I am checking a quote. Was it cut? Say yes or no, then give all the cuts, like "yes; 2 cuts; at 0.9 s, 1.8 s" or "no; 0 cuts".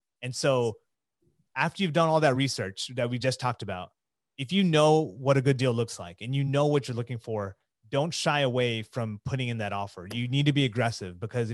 no; 0 cuts